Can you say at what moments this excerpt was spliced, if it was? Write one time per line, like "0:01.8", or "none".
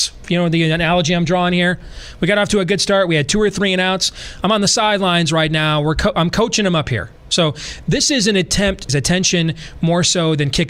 0:03.5
0:08.9